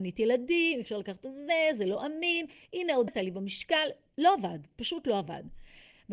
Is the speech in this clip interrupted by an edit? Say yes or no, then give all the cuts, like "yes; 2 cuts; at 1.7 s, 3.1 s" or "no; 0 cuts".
yes; 1 cut; at 3.1 s